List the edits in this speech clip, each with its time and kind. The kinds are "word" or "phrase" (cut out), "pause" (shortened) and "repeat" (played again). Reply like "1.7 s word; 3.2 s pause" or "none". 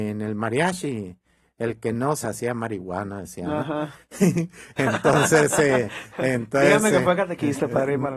2.2 s phrase